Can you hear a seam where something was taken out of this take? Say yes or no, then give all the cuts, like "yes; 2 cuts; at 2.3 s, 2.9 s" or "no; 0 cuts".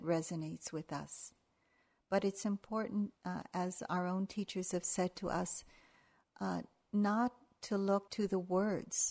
yes; 2 cuts; at 3.1 s, 8.1 s